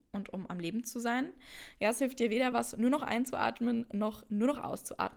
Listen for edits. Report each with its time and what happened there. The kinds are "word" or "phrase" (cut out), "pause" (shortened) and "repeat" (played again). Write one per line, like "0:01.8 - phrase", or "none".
none